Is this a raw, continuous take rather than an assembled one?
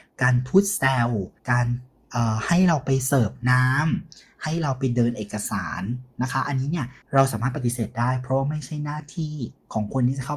no; 2 cuts; at 1.4 s, 7.0 s

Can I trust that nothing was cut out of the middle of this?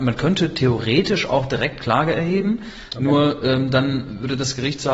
yes; 0 cuts

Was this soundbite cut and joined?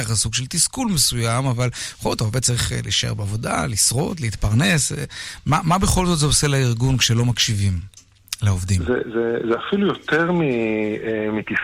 no; 0 cuts

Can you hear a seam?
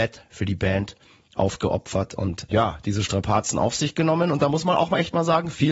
yes; 1 cut; at 2.5 s

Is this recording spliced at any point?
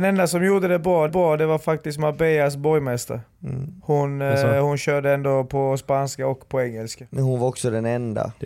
yes; 1 cut; at 1.1 s

